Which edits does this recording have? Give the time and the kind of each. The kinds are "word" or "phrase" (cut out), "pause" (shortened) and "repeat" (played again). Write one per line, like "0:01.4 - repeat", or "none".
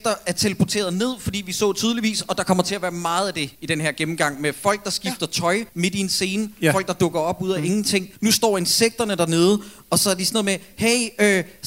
0:03.5 - pause
0:05.7 - pause
0:08.2 - pause